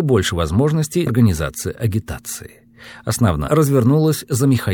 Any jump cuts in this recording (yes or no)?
yes